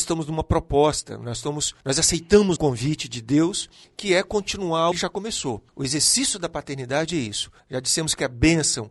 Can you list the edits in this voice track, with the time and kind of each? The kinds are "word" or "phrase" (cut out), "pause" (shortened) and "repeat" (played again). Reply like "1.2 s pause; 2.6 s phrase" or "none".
1.8 s pause; 2.6 s word; 3.8 s pause; 4.9 s phrase; 5.7 s pause; 7.6 s pause